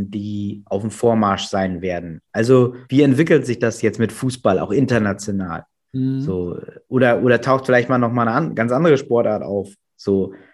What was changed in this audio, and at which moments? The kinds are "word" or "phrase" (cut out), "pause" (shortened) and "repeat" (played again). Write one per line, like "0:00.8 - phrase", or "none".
0:02.8 - pause